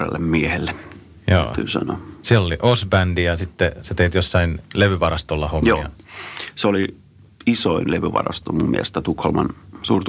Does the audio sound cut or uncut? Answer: uncut